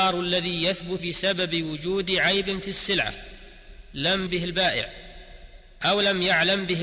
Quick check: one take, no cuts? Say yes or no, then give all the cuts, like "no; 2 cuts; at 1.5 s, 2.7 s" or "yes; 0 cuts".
no; 2 cuts; at 1.0 s, 4.3 s